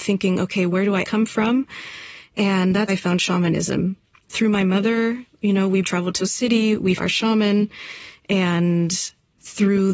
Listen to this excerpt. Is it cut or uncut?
cut